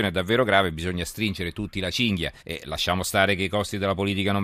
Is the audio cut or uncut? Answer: cut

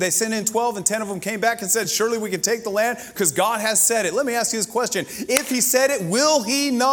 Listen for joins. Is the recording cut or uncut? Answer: uncut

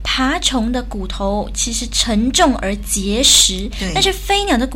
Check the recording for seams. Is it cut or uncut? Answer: uncut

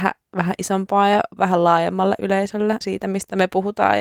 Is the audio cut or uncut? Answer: cut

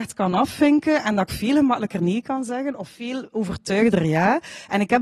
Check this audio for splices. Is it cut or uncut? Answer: uncut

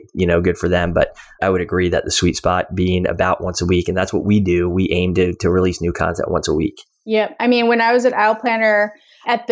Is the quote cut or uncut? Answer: cut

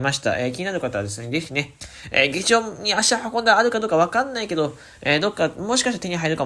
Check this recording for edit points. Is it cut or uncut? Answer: uncut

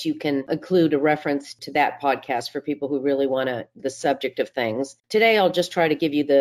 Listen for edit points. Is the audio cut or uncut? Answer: cut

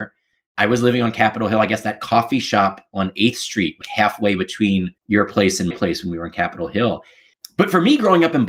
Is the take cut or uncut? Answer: cut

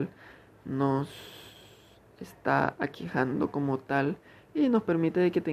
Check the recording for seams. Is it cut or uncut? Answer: uncut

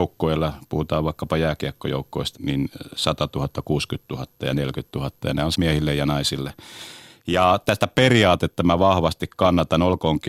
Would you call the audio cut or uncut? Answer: cut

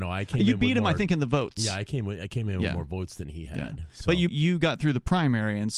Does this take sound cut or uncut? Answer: cut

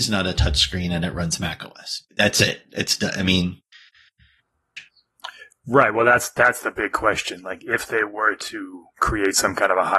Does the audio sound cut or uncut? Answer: cut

